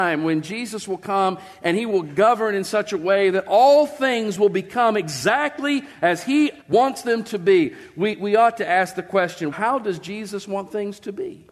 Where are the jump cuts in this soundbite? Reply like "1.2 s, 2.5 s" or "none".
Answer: 6.6 s, 9.5 s